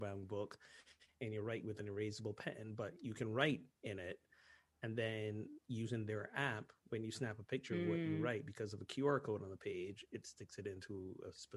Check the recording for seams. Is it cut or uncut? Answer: uncut